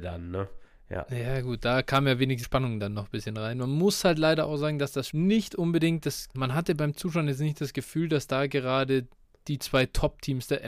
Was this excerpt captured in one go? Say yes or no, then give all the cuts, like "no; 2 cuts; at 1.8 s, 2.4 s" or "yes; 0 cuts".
no; 3 cuts; at 2.4 s, 5.1 s, 6.3 s